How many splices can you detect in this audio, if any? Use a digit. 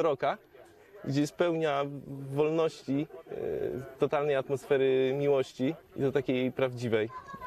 1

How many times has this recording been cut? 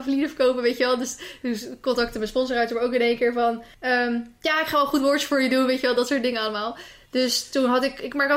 1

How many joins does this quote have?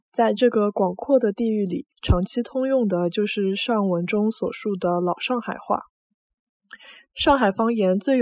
1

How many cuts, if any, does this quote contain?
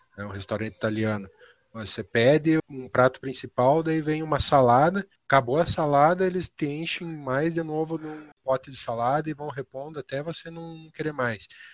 3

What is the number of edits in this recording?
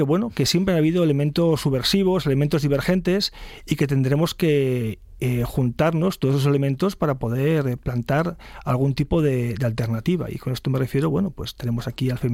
0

